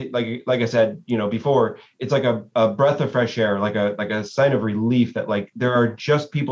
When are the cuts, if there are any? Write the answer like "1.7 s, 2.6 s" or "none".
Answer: none